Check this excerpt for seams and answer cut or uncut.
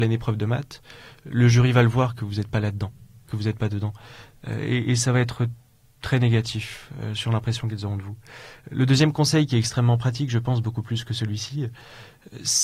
uncut